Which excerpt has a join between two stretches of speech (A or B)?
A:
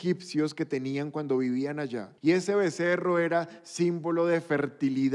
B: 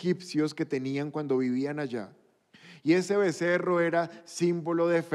A